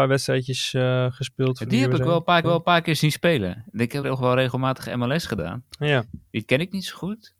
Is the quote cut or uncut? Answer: cut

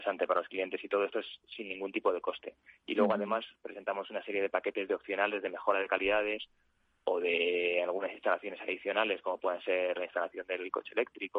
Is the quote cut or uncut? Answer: uncut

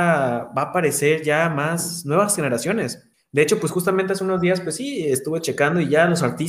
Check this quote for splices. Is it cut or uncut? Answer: cut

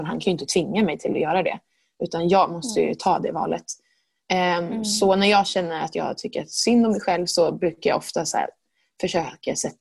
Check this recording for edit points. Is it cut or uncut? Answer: uncut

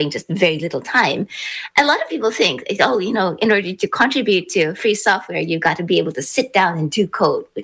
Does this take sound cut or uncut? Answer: uncut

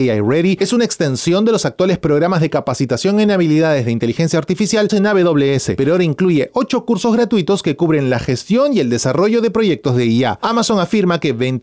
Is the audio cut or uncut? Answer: cut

